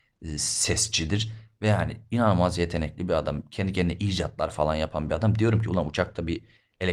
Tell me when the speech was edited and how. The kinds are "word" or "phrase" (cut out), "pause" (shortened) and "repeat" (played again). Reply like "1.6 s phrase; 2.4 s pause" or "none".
none

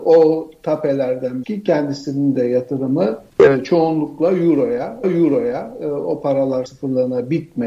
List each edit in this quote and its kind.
1.4 s word; 3.3 s pause; 5.0 s repeat; 6.7 s word

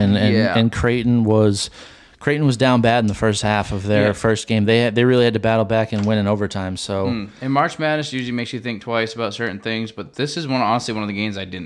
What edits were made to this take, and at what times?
none

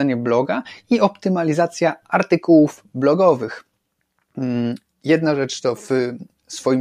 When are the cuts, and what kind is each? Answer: none

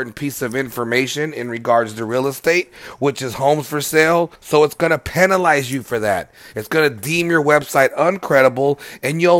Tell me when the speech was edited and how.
4.4 s pause

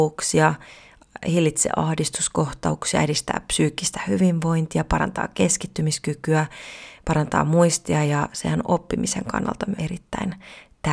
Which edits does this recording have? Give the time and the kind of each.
9.8 s word

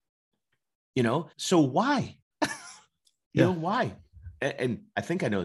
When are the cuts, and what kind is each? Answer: 1.3 s pause; 2.2 s pause

